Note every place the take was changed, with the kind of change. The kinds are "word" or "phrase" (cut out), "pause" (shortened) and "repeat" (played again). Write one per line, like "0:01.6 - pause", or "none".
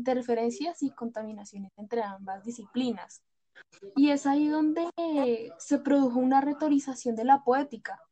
none